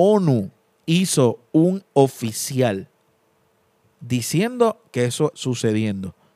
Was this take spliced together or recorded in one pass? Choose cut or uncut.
cut